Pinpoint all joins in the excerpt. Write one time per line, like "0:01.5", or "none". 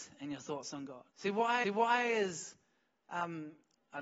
0:01.1
0:01.6